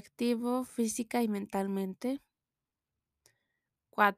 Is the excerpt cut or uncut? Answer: uncut